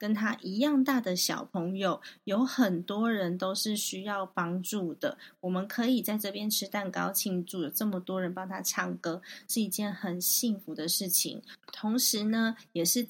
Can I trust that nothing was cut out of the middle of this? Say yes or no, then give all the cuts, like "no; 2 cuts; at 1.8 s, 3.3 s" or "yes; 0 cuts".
no; 1 cut; at 11.6 s